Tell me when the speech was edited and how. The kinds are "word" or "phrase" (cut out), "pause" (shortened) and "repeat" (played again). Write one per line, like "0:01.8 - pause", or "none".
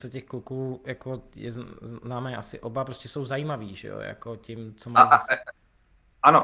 none